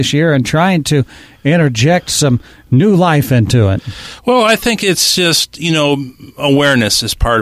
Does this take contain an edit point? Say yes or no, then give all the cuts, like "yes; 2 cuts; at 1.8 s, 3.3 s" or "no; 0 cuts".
no; 0 cuts